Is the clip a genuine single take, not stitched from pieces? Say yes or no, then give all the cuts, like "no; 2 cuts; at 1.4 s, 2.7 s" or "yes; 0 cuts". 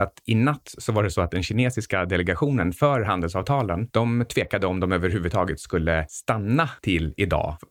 yes; 0 cuts